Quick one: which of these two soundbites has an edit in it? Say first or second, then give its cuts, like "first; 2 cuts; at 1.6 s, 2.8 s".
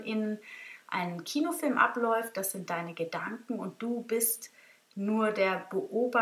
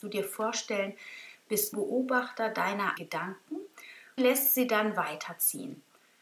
second; 3 cuts; at 1.7 s, 3.0 s, 4.2 s